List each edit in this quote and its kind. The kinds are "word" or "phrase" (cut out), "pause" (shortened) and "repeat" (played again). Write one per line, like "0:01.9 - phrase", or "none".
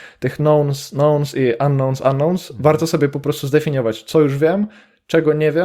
none